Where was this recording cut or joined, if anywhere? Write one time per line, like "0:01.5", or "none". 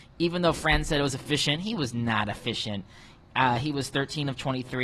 none